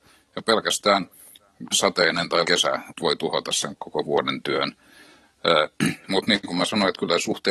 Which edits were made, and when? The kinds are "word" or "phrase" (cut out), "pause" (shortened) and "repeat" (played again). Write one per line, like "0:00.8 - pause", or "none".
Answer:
0:01.7 - word
0:02.4 - word
0:02.9 - word
0:03.7 - word